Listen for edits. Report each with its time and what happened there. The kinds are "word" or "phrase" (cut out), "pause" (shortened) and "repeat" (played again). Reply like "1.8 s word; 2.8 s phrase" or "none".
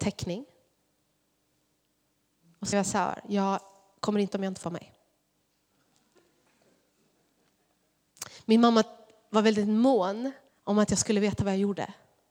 2.7 s word; 4.3 s word; 4.6 s word; 10.5 s pause